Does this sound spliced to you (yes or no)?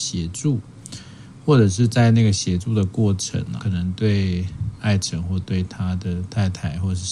yes